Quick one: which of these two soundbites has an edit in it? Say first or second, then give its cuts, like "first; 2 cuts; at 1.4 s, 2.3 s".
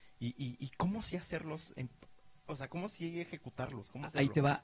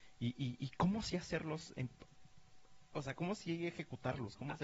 first; 1 cut; at 2.1 s